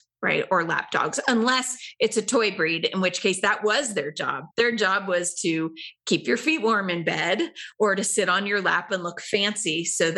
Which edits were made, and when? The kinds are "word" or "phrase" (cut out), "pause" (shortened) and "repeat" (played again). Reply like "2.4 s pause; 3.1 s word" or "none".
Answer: 4.5 s pause